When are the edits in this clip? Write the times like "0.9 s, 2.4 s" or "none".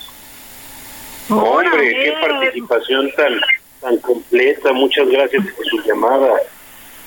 none